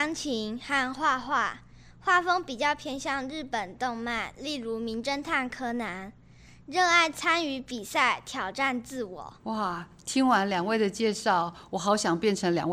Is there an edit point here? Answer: yes; 1 cut; at 9.4 s

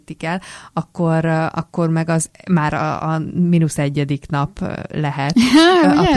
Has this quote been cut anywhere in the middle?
no; 0 cuts

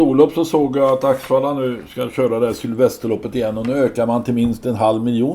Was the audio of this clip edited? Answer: no; 0 cuts

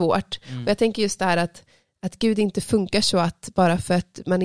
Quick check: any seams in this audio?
no; 0 cuts

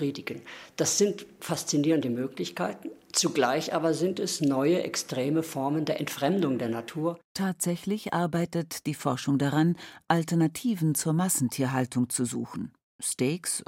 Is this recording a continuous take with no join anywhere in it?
no; 1 cut; at 7.2 s

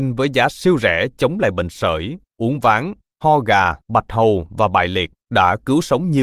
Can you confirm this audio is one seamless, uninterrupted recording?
no; 2 cuts; at 3.8 s, 5.2 s

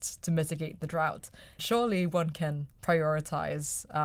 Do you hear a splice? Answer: yes; 2 cuts; at 1.6 s, 2.7 s

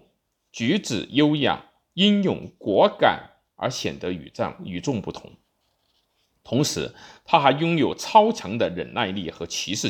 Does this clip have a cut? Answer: no; 0 cuts

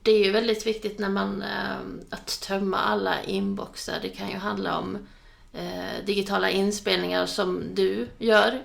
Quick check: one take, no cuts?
yes; 0 cuts

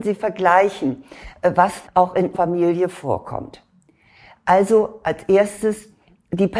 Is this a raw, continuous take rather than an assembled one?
no; 2 cuts; at 1.8 s, 2.3 s

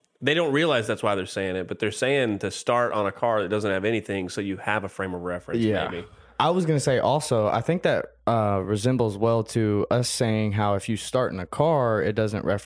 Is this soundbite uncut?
yes; 0 cuts

